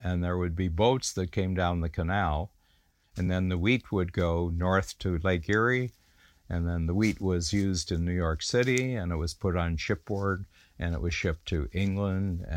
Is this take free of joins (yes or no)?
yes